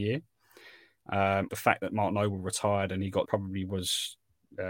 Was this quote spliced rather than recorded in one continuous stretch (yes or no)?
yes